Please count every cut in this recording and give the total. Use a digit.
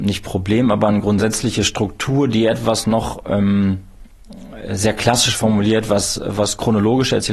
0